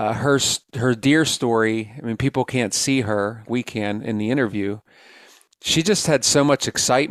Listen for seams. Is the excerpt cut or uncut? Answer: cut